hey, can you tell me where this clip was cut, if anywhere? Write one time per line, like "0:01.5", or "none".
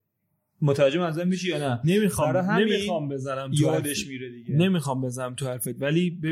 none